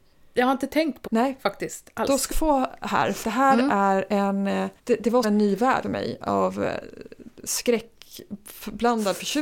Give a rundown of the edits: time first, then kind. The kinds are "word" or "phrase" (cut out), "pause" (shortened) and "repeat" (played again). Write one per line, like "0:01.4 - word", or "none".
0:01.1 - word
0:02.3 - word
0:03.2 - word
0:04.8 - pause
0:05.2 - word
0:05.8 - word